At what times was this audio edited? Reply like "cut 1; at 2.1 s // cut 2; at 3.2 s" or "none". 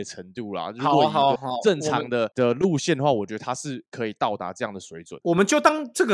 cut 1; at 1.4 s